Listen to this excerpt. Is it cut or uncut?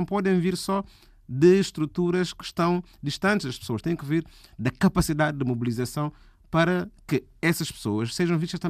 uncut